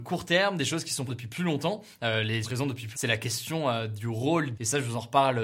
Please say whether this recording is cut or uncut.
cut